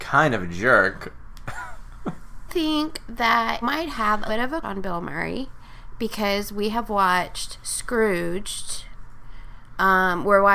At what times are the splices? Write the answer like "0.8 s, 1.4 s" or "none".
2.5 s, 3.6 s, 4.3 s, 4.6 s